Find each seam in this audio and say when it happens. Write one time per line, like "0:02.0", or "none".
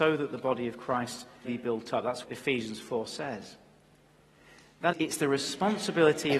0:01.4
0:02.2
0:04.9